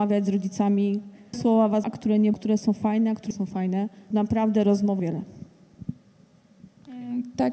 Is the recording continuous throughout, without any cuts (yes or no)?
no